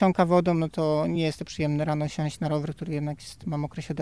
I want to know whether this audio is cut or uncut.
uncut